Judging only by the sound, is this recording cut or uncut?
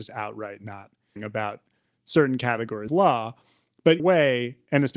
cut